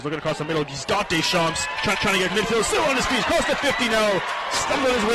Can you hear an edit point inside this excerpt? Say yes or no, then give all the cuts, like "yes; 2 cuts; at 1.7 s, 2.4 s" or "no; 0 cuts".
yes; 2 cuts; at 1.9 s, 2.3 s